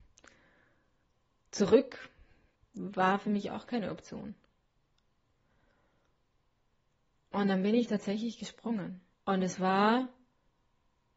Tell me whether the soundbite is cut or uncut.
cut